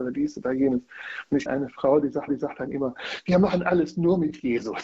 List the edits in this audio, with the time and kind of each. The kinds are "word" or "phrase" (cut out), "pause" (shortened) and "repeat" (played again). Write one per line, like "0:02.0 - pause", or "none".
0:01.5 - word
0:02.3 - repeat